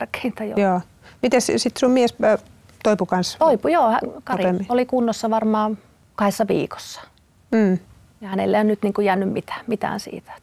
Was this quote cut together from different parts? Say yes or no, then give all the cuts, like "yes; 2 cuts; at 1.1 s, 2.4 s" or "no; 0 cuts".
no; 0 cuts